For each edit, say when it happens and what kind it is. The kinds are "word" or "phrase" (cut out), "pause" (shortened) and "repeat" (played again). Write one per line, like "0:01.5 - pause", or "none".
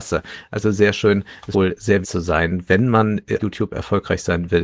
0:01.5 - word
0:02.0 - word
0:03.4 - word

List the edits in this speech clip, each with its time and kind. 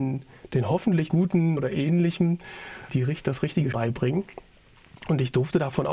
0:01.1 - word
0:01.6 - word
0:02.9 - word
0:03.7 - word

